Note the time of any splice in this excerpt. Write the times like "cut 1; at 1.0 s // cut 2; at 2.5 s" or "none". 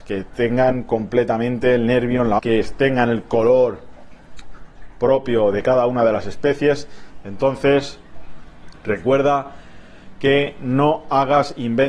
cut 1; at 2.4 s